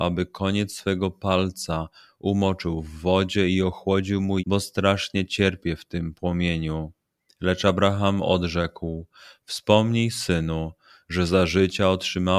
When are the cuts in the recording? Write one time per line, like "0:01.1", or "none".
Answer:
0:04.4